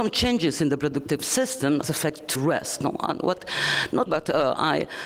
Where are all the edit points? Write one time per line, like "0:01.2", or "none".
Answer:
0:01.8
0:02.4
0:04.1